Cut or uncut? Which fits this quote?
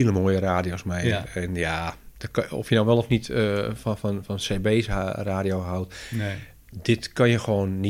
uncut